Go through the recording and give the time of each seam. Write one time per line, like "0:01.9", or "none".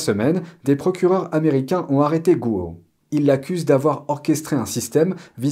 none